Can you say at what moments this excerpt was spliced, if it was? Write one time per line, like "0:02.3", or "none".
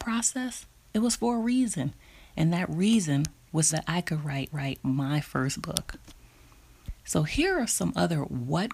0:03.7
0:04.5